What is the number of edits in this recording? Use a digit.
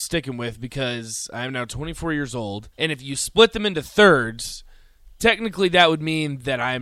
1